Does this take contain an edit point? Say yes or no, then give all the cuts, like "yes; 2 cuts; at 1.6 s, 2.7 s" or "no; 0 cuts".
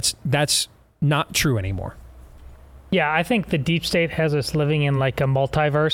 no; 0 cuts